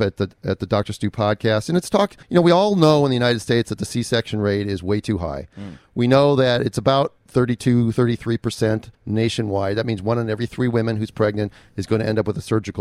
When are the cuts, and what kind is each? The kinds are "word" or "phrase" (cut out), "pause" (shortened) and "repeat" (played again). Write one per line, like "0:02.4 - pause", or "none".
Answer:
0:02.2 - pause
0:07.2 - pause
0:08.9 - pause

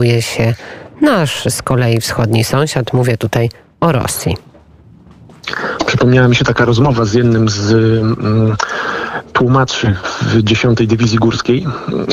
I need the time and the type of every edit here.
none

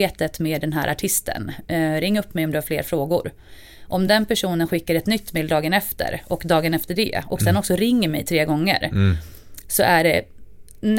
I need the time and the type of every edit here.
none

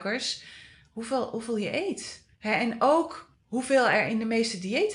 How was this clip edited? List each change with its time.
0:02.3 - pause

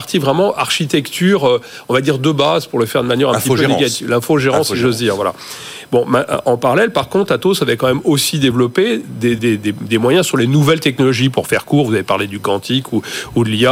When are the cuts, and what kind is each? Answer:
0:09.4 - word

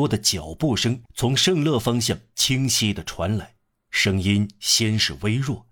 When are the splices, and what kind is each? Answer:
0:01.1 - pause
0:03.7 - pause

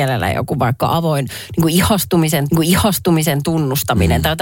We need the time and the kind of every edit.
0:02.5 - repeat

